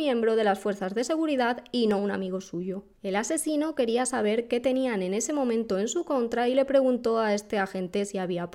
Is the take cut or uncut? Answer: cut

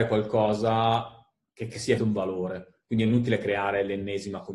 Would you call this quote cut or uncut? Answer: cut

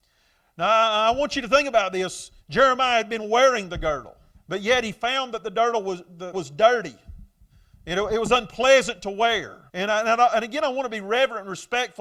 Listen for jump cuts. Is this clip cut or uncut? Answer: cut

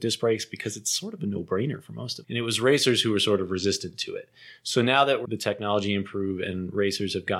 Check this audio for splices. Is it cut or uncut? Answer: cut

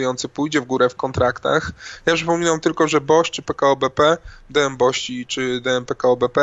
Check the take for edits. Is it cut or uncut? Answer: uncut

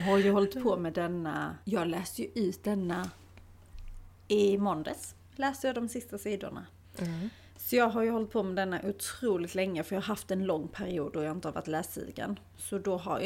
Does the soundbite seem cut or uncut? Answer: cut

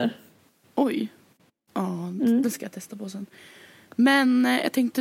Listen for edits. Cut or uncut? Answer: uncut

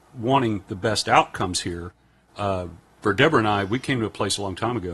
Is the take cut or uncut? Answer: uncut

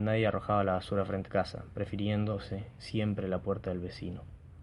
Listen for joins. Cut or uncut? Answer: cut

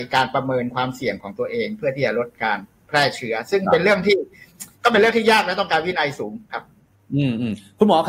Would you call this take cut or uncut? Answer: cut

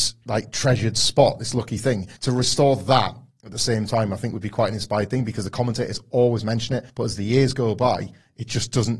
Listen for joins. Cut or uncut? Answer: cut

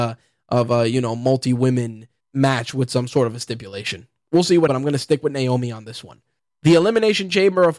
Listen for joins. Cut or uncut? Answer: cut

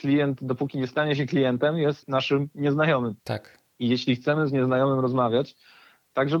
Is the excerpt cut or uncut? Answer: cut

